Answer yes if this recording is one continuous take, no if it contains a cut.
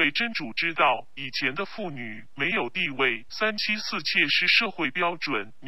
no